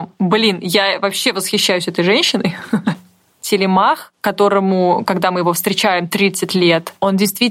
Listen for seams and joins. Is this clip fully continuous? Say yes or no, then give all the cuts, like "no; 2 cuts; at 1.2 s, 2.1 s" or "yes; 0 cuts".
yes; 0 cuts